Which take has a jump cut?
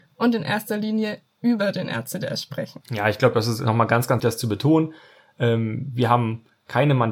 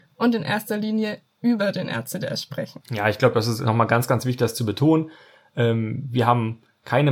first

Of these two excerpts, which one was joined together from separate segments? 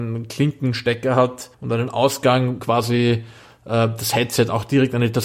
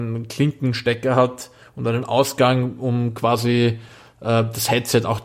first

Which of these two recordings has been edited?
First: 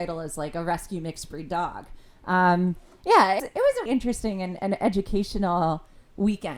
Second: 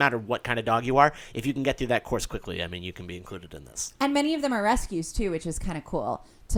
first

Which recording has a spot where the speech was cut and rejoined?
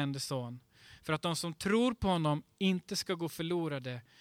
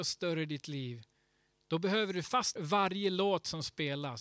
second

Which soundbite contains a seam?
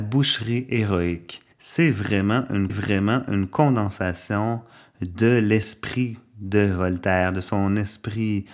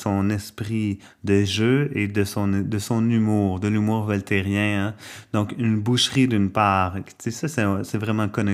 first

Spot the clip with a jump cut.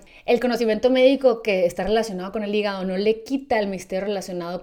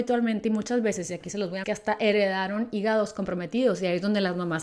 second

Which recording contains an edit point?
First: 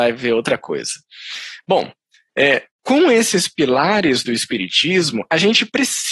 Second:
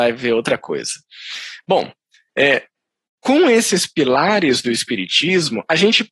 first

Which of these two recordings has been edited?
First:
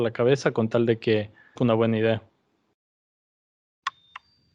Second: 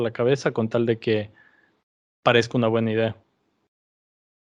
first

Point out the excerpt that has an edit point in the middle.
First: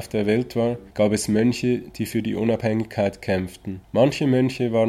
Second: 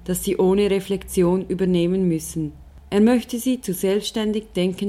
first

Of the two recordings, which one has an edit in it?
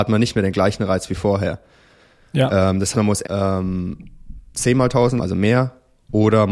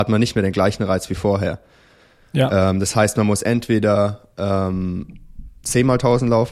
first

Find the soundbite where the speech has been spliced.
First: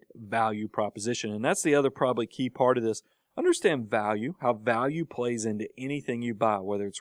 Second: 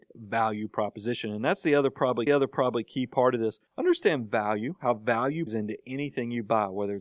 second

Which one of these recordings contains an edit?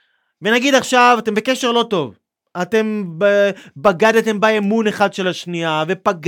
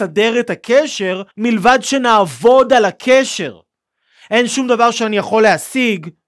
second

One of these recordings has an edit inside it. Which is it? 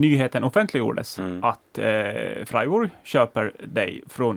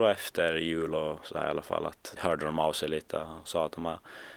second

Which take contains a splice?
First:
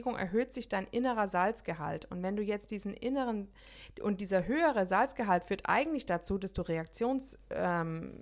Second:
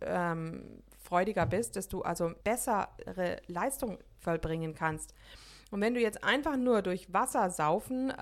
second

